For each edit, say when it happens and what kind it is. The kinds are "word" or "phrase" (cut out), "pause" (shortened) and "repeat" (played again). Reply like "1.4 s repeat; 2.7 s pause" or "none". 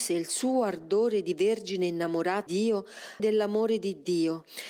2.5 s word; 3.2 s word